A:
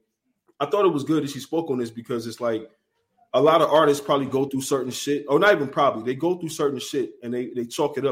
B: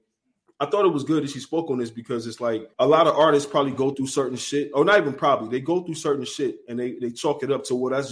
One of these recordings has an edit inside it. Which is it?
B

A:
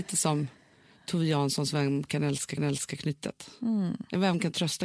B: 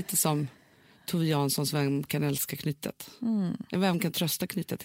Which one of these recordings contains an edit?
A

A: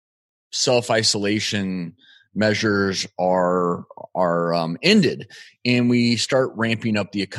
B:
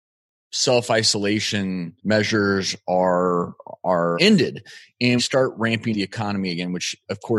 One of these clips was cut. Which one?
B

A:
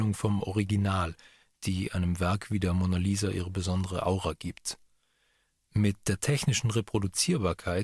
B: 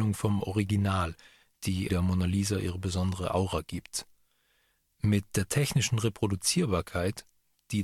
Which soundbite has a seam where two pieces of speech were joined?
B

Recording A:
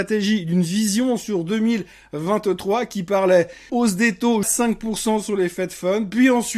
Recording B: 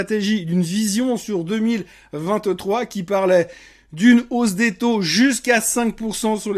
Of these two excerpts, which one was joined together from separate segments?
A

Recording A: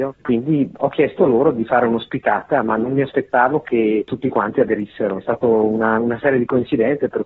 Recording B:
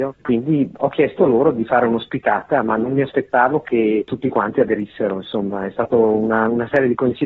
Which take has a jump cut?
A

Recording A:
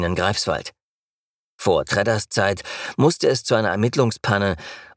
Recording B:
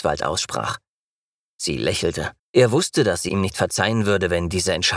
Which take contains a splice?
B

